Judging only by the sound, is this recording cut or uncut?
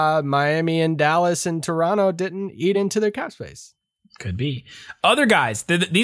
uncut